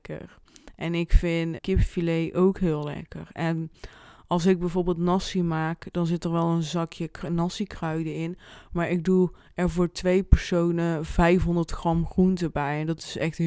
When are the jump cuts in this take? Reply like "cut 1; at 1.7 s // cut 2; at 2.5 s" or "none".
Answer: cut 1; at 1.6 s